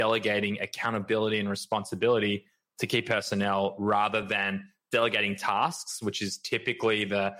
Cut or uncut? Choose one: uncut